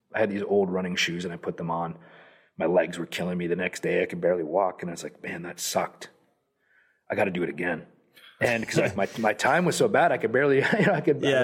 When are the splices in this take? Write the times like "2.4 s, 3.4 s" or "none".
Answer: none